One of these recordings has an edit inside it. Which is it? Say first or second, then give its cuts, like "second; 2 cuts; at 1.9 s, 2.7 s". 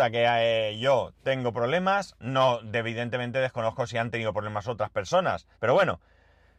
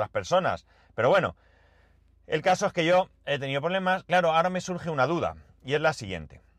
first; 1 cut; at 5.5 s